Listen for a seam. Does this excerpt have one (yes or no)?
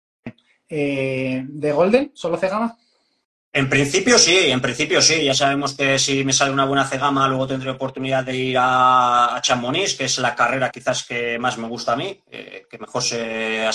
yes